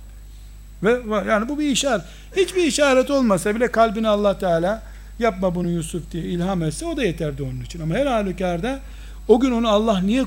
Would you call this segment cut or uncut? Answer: uncut